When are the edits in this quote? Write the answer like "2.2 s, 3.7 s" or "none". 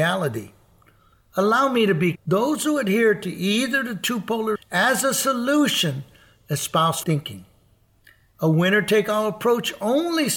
2.1 s, 4.6 s, 7.0 s